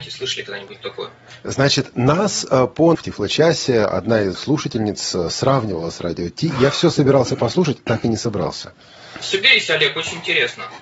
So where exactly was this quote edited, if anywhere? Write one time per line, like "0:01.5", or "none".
0:02.9
0:04.3